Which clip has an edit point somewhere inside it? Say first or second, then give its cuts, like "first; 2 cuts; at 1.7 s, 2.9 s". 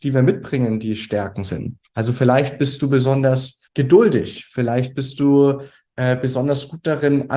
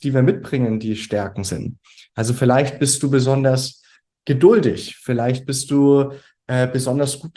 first; 2 cuts; at 1.9 s, 3.7 s